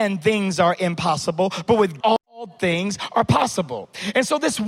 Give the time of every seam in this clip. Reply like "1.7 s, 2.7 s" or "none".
2.0 s